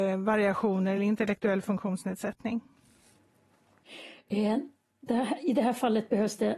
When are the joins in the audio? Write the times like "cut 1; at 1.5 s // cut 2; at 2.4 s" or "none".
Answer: none